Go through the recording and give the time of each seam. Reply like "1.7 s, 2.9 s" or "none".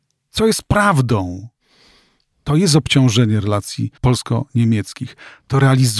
4.0 s